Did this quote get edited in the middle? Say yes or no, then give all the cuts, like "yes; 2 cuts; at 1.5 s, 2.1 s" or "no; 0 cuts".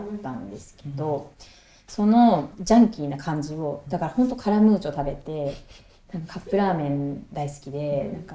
no; 0 cuts